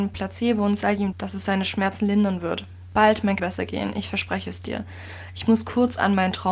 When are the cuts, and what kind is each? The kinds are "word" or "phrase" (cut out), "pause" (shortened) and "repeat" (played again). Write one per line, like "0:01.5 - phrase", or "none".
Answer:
0:01.1 - word
0:03.4 - phrase